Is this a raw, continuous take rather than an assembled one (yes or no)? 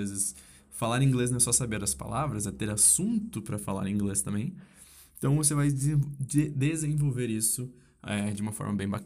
yes